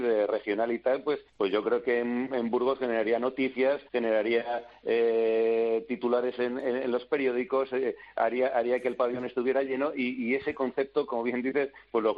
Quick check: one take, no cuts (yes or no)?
no